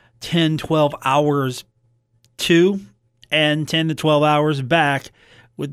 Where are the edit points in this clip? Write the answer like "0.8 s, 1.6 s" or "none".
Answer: none